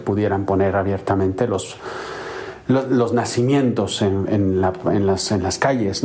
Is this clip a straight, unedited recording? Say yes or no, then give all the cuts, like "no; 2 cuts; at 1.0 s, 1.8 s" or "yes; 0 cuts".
yes; 0 cuts